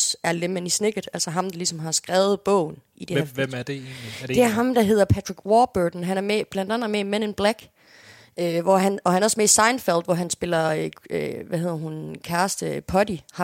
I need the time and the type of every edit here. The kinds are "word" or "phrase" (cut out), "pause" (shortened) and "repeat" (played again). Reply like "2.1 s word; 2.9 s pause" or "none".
none